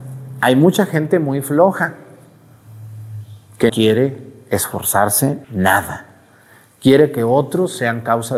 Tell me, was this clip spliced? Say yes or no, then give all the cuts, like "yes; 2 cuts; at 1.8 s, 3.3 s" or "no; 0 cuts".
yes; 2 cuts; at 3.7 s, 5.4 s